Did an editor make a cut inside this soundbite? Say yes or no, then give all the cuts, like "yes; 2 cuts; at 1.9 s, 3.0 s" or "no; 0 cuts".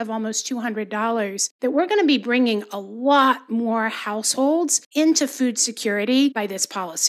yes; 1 cut; at 1.5 s